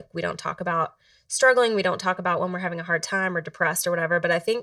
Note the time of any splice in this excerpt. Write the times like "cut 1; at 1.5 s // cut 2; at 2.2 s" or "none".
none